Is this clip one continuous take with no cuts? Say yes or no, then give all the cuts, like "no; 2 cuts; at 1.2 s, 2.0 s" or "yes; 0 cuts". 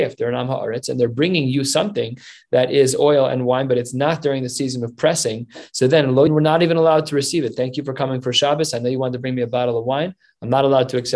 no; 1 cut; at 6.3 s